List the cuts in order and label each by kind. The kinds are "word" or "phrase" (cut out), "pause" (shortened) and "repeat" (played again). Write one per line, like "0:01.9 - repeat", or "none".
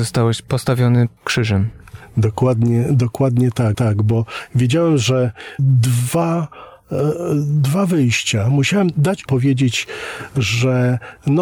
0:01.2 - word
0:03.7 - repeat
0:05.6 - word
0:09.3 - phrase